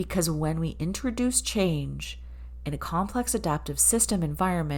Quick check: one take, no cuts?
yes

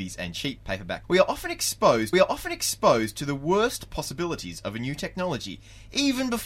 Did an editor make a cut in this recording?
yes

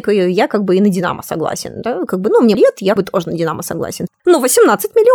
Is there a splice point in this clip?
yes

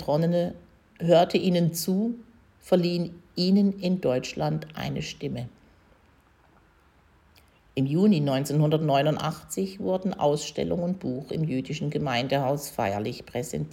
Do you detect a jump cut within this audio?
no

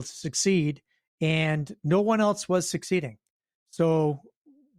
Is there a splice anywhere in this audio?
no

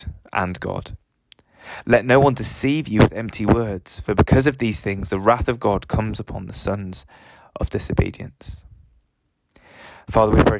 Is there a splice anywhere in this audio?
no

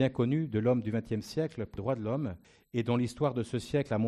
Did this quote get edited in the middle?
yes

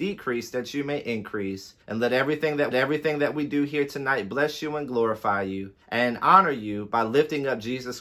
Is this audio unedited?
no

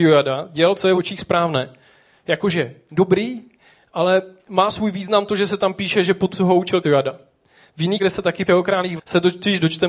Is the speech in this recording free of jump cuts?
no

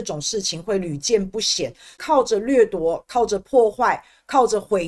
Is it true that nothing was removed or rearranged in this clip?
yes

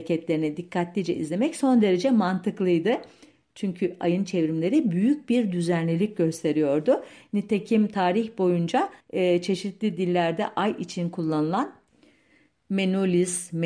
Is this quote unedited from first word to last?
no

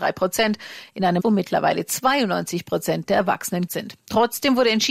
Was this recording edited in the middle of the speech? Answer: yes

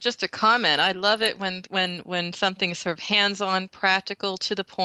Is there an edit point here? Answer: no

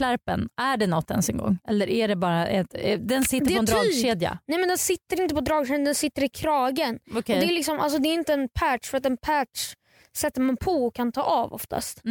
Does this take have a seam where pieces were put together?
no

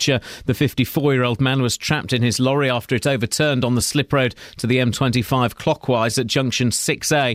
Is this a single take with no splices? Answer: yes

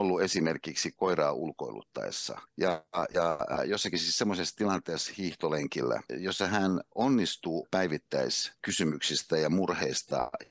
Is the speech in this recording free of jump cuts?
no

